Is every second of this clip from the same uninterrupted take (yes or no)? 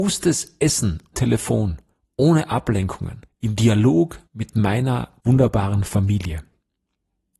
no